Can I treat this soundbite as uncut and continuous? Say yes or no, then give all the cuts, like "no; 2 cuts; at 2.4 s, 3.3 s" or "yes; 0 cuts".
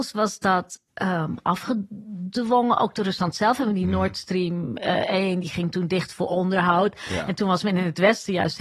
yes; 0 cuts